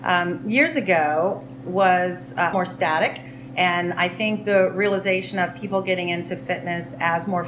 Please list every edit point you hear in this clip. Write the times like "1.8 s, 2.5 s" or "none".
1.6 s, 2.5 s